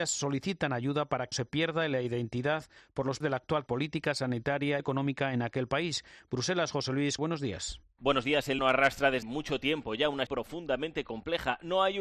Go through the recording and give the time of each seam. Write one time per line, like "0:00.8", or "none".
0:01.3
0:03.2
0:03.7
0:04.8
0:07.2
0:08.6
0:09.2
0:10.3